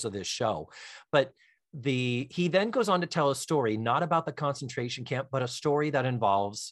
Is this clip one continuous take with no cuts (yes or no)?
yes